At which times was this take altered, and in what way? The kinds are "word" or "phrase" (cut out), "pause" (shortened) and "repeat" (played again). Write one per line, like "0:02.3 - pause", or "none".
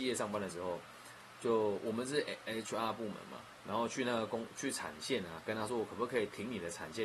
none